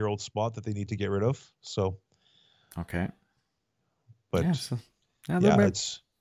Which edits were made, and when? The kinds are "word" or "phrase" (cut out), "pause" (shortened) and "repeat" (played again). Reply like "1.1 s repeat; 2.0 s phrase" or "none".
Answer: none